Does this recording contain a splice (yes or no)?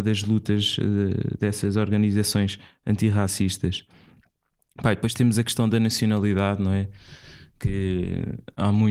no